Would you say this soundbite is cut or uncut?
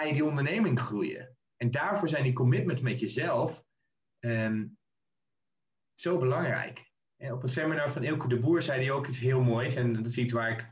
uncut